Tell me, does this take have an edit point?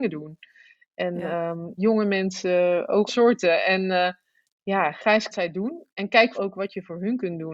yes; 6 cuts; at 1.8 s, 3.1 s, 4.4 s, 5.3 s, 5.9 s, 6.3 s

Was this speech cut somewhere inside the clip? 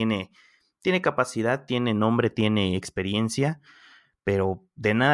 no; 0 cuts

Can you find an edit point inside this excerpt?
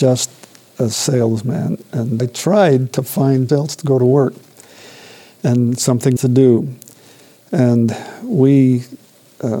yes; 3 cuts; at 2.2 s, 3.5 s, 6.2 s

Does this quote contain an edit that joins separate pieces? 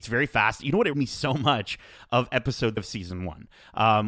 yes; 2 cuts; at 0.9 s, 2.8 s

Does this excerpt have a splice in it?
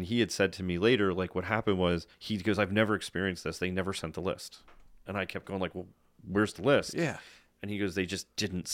yes; 1 cut; at 2.1 s

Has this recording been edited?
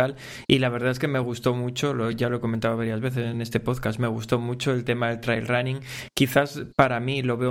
no; 0 cuts

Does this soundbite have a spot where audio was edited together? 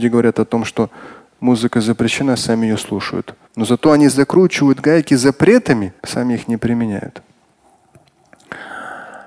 yes; 3 cuts; at 3.4 s, 4.1 s, 6.0 s

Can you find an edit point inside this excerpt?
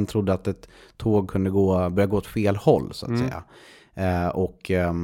no; 0 cuts

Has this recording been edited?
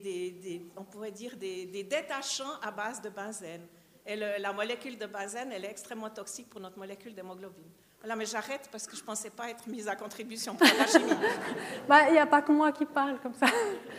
no; 0 cuts

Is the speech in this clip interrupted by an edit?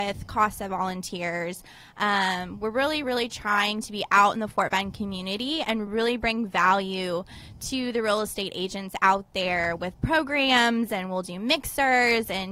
no; 0 cuts

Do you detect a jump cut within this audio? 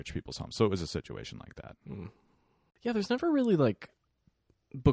no; 0 cuts

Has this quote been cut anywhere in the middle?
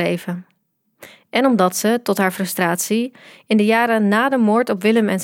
no; 0 cuts

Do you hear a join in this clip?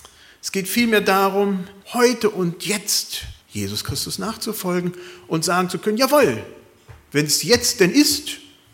yes; 2 cuts; at 1.8 s, 3.4 s

